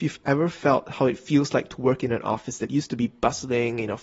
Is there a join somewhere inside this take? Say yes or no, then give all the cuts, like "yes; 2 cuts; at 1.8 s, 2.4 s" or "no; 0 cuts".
no; 0 cuts